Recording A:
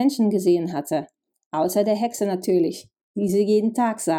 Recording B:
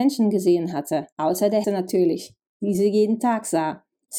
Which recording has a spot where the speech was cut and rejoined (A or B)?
B